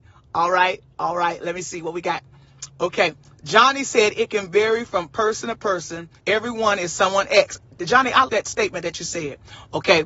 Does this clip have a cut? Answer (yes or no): yes